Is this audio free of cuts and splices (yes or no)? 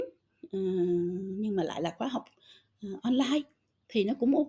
yes